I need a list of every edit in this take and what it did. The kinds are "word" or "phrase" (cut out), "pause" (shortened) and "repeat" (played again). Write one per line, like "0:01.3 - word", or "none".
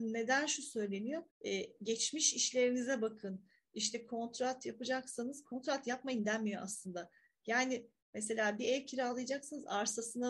0:01.3 - pause